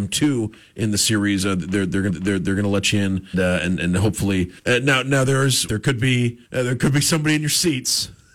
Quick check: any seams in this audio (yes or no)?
yes